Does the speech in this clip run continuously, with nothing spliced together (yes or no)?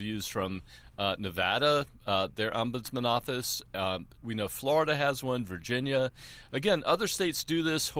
no